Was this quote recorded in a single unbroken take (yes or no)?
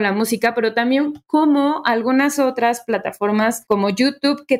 yes